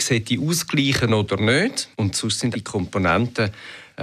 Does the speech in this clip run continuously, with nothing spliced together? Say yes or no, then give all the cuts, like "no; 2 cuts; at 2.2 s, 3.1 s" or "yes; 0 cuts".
no; 2 cuts; at 1.9 s, 2.5 s